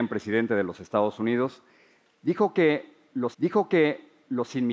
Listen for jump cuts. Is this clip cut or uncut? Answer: cut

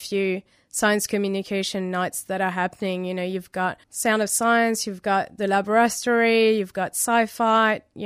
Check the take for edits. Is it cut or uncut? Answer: cut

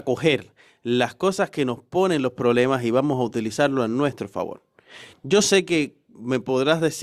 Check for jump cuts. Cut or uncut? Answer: uncut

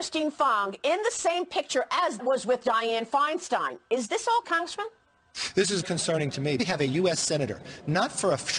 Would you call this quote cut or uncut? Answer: cut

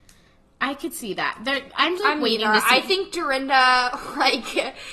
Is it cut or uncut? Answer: cut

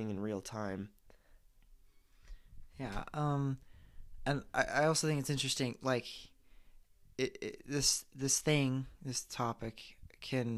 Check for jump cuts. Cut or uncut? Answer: uncut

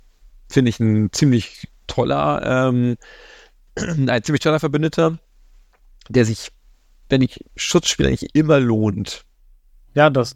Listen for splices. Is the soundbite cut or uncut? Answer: uncut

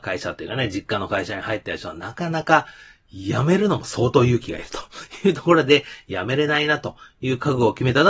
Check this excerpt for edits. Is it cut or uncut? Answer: uncut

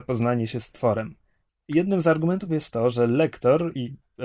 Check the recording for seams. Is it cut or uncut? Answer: uncut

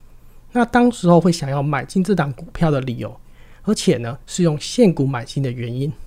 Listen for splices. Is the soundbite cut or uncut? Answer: uncut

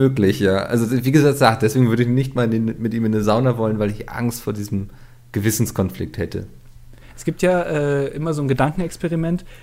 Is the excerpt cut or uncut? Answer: uncut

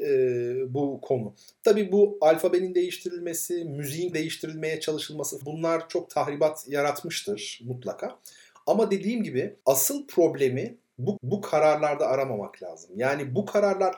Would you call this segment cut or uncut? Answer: cut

